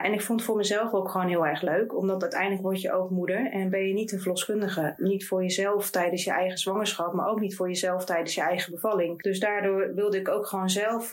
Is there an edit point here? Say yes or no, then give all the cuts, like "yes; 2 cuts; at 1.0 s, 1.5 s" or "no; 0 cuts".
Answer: no; 0 cuts